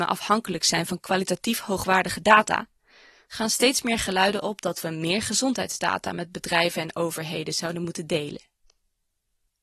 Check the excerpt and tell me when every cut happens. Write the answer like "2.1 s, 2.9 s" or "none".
none